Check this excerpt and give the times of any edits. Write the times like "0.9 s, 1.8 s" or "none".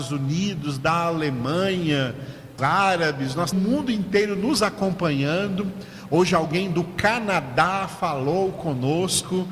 2.6 s, 3.5 s